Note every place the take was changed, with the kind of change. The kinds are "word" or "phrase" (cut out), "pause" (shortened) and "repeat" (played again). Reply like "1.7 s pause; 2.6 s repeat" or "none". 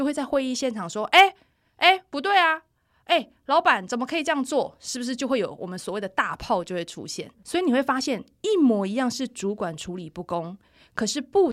none